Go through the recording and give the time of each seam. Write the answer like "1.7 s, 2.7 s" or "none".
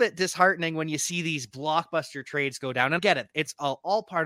3.0 s